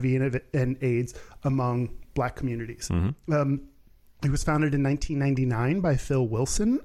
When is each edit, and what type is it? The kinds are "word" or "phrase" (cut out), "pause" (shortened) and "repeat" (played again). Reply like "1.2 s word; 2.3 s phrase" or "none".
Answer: none